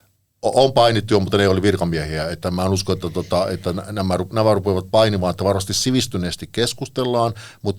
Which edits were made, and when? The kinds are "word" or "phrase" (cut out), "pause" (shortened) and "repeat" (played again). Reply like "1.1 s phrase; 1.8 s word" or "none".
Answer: none